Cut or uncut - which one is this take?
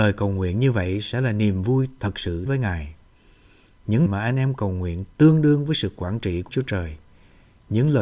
cut